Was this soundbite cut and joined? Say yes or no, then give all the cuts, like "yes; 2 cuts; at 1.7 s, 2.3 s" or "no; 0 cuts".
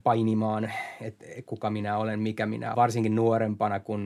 yes; 1 cut; at 2.7 s